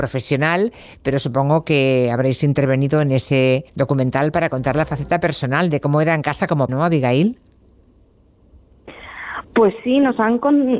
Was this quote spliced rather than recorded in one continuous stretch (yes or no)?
yes